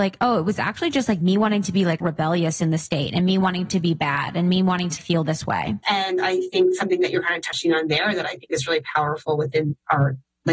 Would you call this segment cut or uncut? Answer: cut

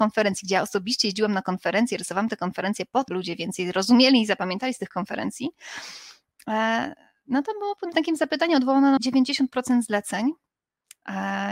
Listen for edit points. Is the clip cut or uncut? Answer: cut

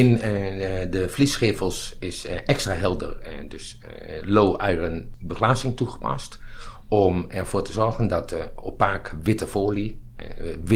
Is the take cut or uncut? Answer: uncut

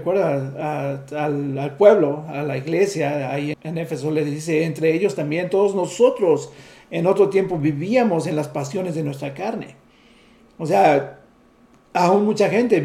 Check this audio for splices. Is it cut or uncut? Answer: cut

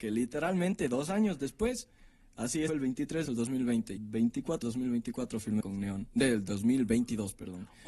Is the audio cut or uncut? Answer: cut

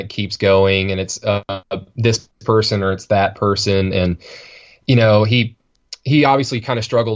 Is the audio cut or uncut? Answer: uncut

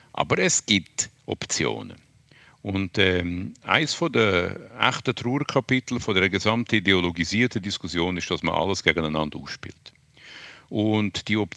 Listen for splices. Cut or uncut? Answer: cut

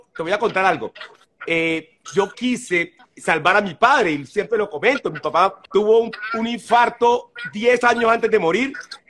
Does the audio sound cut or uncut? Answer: cut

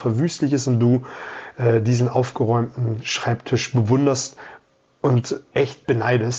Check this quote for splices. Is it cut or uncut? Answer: uncut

